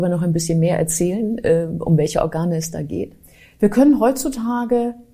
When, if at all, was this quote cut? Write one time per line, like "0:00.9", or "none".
none